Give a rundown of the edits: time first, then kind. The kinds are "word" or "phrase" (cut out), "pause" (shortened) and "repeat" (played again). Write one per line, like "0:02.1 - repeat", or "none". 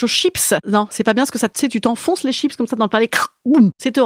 0:01.5 - word

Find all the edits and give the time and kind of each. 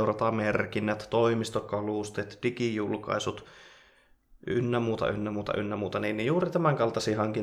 none

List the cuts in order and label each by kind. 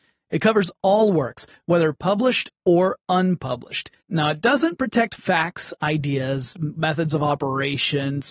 0:04.0 - pause

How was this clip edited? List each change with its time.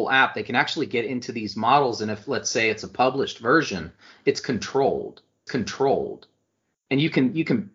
0:05.5 - repeat

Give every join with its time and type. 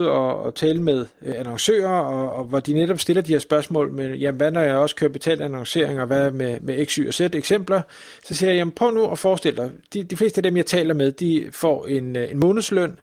none

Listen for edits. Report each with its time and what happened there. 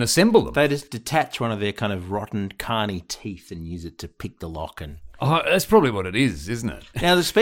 none

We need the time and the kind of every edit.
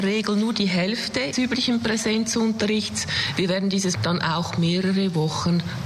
0:01.3 - word
0:03.9 - word

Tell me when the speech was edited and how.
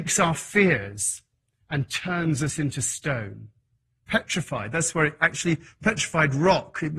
none

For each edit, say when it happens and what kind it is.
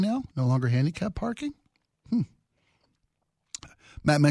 none

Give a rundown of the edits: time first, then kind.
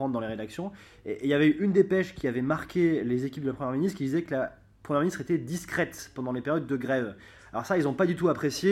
none

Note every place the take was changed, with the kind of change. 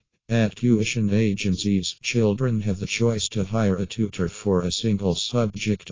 none

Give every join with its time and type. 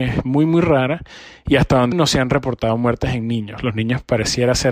0:01.9 - word

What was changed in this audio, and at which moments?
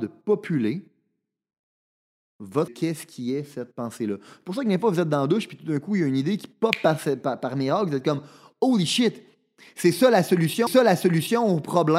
0:02.7 - phrase
0:10.7 - repeat

